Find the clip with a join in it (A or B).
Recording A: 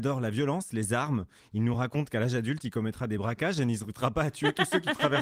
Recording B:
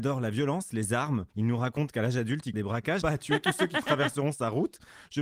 B